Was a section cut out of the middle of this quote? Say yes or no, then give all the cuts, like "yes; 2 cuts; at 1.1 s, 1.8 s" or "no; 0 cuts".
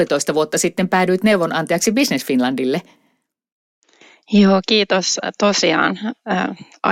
no; 0 cuts